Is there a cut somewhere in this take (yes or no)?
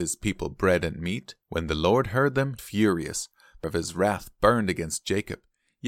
yes